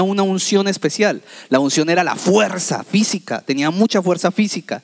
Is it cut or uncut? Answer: uncut